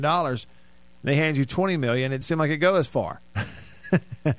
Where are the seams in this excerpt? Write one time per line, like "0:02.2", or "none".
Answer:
0:02.2